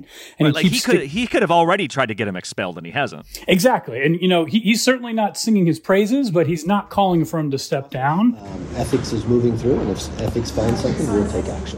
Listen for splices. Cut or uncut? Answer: uncut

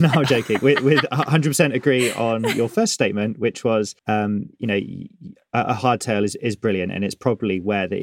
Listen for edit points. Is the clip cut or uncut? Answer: cut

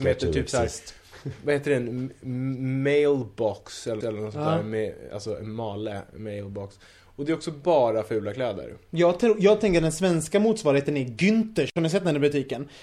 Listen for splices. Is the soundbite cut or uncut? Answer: cut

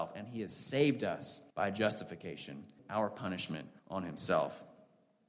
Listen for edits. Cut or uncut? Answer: cut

